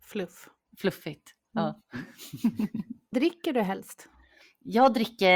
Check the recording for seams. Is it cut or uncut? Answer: cut